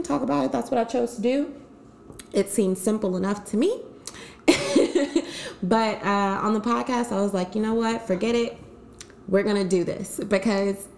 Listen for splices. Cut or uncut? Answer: uncut